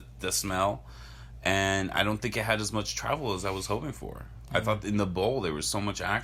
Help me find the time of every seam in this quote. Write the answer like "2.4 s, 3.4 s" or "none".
none